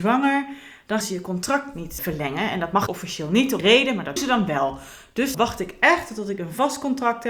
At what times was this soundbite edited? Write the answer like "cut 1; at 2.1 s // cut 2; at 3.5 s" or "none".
cut 1; at 1.0 s // cut 2; at 2.0 s // cut 3; at 2.9 s // cut 4; at 3.6 s // cut 5; at 4.2 s // cut 6; at 5.3 s